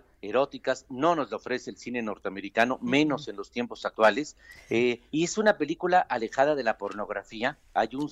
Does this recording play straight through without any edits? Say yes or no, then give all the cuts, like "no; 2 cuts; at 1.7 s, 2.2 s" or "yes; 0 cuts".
yes; 0 cuts